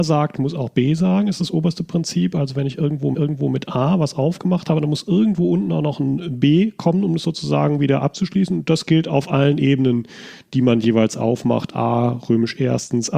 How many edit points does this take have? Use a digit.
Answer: 1